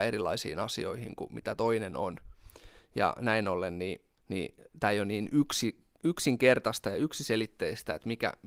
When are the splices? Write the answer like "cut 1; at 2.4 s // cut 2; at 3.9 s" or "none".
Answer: cut 1; at 4.2 s